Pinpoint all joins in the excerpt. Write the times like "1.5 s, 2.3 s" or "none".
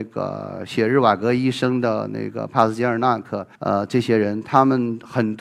3.6 s